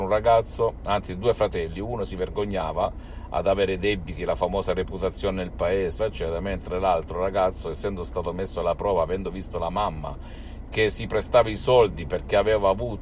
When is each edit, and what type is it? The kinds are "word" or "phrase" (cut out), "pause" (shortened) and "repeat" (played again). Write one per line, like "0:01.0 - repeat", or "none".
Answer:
0:06.0 - word